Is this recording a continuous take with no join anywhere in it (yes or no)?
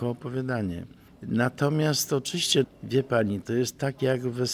no